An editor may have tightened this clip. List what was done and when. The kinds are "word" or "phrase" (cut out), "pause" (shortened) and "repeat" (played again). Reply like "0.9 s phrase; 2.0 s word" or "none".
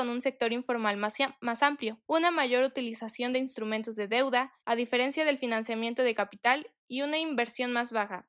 2.1 s pause; 4.6 s pause